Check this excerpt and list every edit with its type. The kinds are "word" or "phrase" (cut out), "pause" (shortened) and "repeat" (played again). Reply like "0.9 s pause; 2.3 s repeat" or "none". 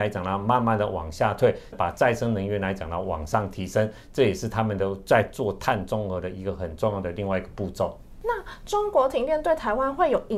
1.7 s phrase